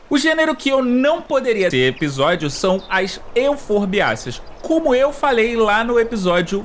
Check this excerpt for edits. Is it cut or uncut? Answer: cut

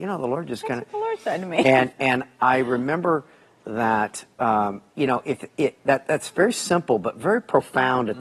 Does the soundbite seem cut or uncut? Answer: cut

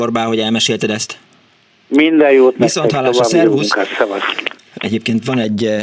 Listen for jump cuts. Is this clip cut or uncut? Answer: uncut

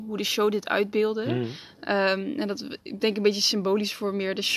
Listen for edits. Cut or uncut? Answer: uncut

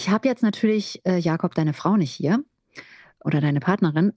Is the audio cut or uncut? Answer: uncut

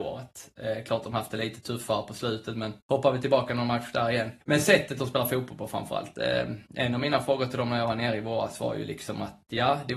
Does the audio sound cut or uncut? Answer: cut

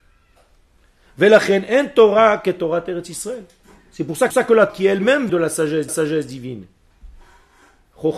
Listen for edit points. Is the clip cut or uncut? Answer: cut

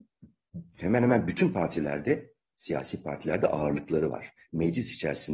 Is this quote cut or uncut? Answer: uncut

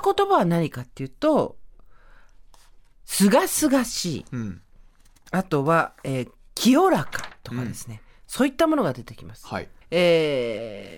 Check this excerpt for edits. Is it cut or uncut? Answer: cut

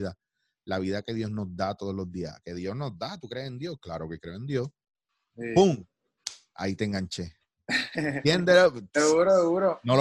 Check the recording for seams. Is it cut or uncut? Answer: uncut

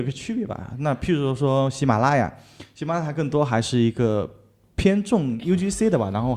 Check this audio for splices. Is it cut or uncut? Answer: uncut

